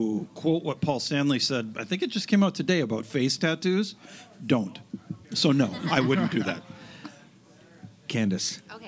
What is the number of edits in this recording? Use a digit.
1